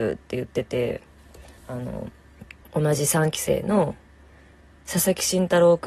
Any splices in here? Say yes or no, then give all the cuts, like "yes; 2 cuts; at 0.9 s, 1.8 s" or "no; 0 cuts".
yes; 2 cuts; at 1.6 s, 2.6 s